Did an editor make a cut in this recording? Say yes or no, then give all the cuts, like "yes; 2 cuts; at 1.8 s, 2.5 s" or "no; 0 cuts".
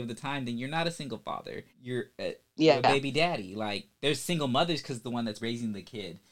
yes; 3 cuts; at 1.7 s, 5.0 s, 5.4 s